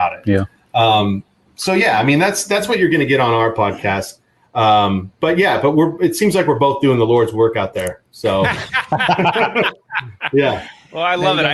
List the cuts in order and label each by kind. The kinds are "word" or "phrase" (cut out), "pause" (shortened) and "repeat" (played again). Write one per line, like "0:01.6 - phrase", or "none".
0:05.1 - pause